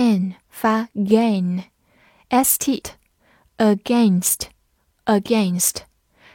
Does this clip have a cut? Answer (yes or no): yes